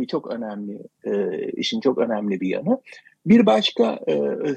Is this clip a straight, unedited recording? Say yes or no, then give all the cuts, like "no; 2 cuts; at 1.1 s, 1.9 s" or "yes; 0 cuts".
yes; 0 cuts